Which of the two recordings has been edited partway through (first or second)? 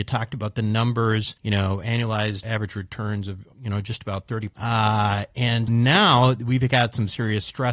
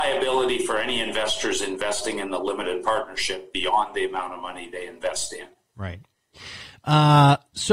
first